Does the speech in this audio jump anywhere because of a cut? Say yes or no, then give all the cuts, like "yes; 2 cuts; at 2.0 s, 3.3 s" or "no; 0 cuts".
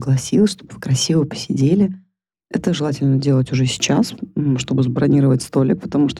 no; 0 cuts